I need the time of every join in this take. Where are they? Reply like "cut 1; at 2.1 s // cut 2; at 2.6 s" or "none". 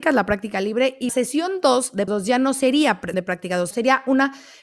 cut 1; at 1.1 s // cut 2; at 2.1 s // cut 3; at 3.1 s // cut 4; at 3.7 s

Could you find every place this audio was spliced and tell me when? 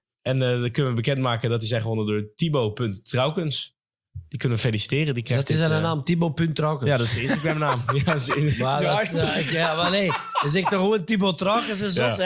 none

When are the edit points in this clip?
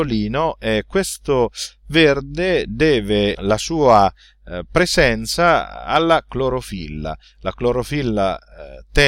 cut 1; at 3.3 s

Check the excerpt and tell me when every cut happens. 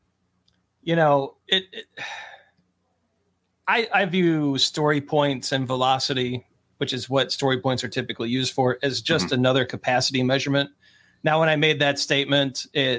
none

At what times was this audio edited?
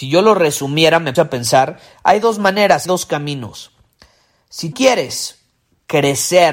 cut 1; at 1.1 s // cut 2; at 2.8 s // cut 3; at 4.7 s

